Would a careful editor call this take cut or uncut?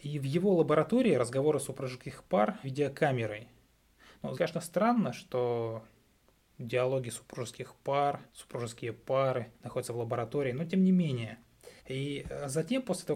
cut